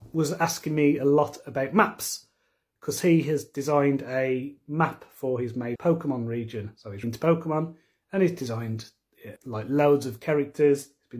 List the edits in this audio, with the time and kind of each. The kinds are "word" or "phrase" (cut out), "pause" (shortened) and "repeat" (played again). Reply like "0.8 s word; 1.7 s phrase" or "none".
5.8 s word; 7.0 s word; 9.4 s word